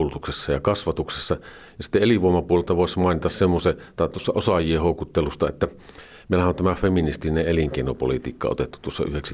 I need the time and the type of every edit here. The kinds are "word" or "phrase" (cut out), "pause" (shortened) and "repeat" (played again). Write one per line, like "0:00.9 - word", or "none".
none